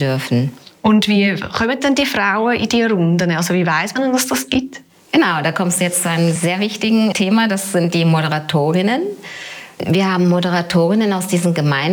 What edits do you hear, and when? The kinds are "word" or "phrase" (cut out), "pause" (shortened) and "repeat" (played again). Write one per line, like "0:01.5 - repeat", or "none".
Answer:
none